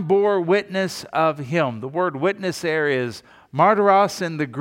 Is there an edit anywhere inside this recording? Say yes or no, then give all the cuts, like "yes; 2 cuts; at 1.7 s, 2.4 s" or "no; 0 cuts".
no; 0 cuts